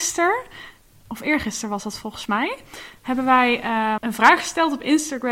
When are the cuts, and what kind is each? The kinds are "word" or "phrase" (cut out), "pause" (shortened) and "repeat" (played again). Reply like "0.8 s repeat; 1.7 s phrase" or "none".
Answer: 4.0 s word